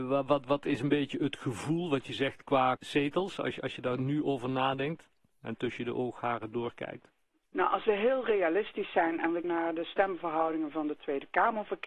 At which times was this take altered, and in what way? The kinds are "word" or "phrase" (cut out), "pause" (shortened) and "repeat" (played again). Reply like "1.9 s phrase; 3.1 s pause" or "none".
2.8 s word; 9.4 s word